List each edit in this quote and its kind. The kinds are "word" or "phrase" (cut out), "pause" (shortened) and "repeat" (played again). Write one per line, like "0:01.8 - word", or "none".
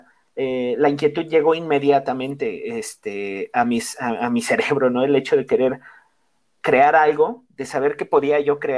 none